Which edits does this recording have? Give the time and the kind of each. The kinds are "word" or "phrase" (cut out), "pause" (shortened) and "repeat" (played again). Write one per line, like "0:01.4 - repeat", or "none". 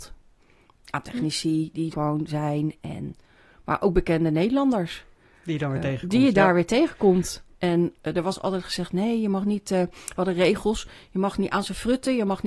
0:01.9 - word